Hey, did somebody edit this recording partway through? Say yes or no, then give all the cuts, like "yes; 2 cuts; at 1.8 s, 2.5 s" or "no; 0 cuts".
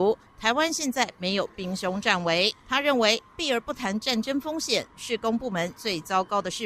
yes; 1 cut; at 2.6 s